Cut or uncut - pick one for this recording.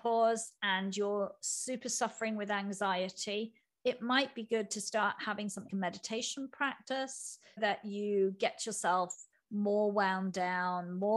cut